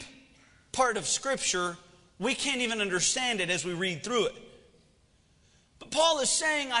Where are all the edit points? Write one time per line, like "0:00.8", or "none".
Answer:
none